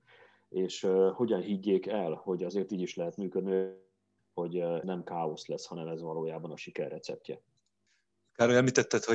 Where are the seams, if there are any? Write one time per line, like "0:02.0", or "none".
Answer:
0:04.8

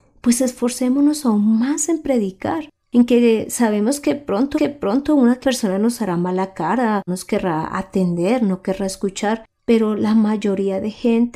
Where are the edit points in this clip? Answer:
0:04.5
0:05.4
0:07.1

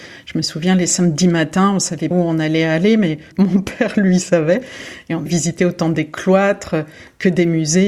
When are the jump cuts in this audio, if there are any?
0:02.1
0:03.3
0:05.3

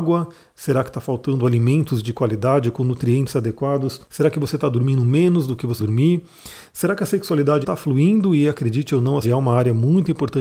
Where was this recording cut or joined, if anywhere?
0:04.0
0:05.8
0:07.6
0:09.2

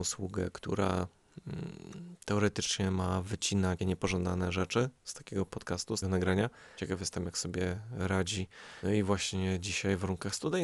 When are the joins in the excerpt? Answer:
0:03.8
0:06.0

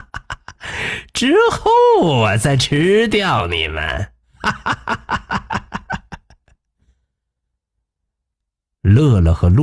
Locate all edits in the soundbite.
none

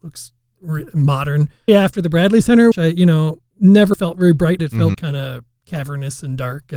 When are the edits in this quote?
0:01.7
0:02.7
0:03.9
0:04.6
0:04.9

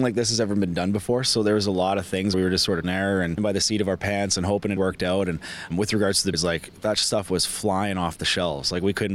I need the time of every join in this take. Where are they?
0:02.3
0:02.8
0:03.4
0:04.8
0:05.7
0:06.3

